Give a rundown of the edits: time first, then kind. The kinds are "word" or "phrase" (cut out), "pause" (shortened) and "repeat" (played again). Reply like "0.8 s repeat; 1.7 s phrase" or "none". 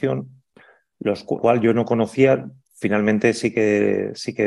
1.4 s word